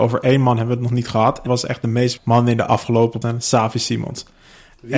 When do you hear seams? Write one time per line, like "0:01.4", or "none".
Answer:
0:01.5
0:02.2
0:03.2